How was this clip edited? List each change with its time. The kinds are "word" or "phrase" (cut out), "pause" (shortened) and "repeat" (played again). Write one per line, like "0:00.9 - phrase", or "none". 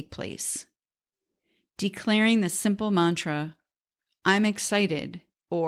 none

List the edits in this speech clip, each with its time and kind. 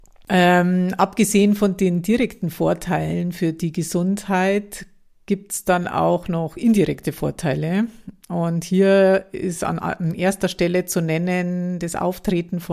none

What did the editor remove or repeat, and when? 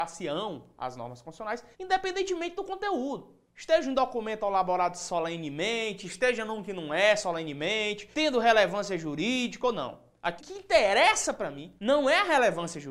0:01.7 - pause
0:03.5 - pause
0:08.1 - pause
0:10.4 - word
0:11.8 - pause

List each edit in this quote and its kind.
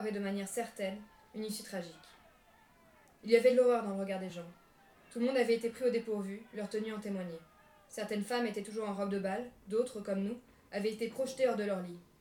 none

